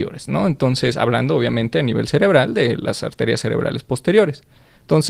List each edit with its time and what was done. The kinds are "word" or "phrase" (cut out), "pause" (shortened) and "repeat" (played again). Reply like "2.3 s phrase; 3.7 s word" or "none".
none